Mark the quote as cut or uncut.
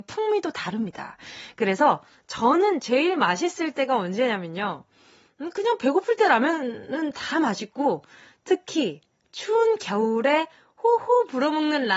uncut